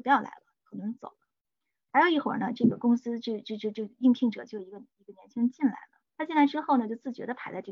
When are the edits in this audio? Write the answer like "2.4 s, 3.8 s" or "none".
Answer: 6.1 s